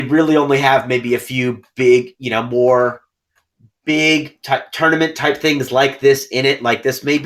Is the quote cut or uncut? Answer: uncut